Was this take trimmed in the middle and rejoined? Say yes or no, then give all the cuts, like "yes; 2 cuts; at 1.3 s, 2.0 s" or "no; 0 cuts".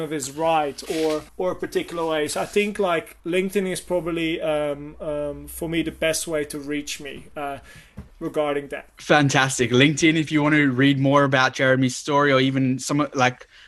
yes; 3 cuts; at 1.3 s, 3.2 s, 8.1 s